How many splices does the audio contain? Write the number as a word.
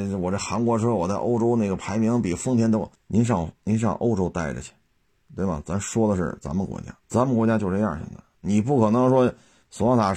two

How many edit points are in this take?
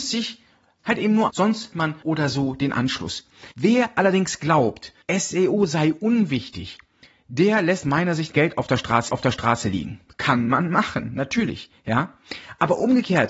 eight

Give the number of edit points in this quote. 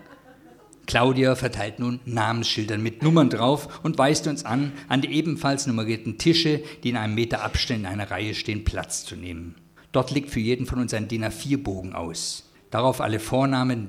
two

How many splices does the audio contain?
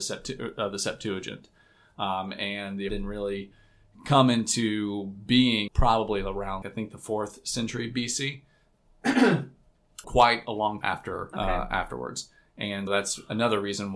seven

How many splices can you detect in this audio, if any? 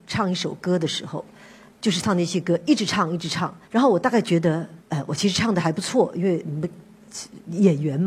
two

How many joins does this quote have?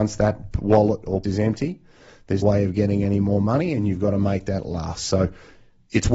two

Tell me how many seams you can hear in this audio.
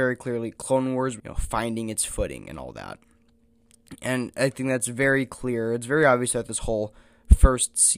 one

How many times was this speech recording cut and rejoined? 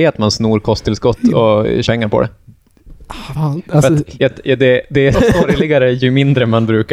four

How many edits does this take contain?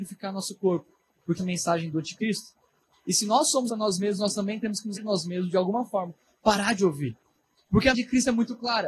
four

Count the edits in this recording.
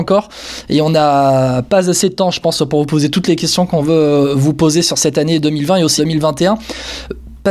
one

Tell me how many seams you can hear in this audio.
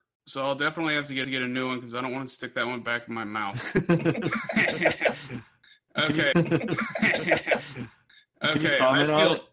two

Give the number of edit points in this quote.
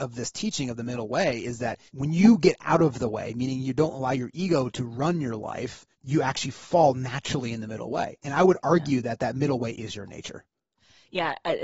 two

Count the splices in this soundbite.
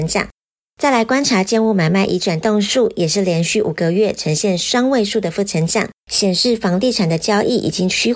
one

